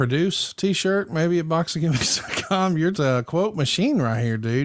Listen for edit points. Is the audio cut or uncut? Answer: cut